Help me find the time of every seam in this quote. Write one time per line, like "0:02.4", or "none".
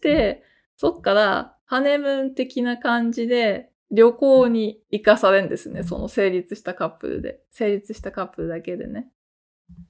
0:03.8